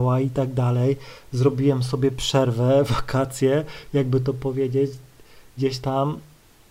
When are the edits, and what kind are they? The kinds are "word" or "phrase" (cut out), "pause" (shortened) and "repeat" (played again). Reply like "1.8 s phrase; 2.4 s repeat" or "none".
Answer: 5.6 s word